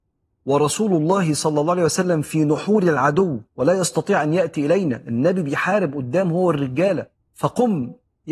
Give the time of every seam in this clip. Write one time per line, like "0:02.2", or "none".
0:03.5
0:07.2